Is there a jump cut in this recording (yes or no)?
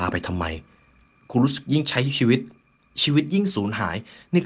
no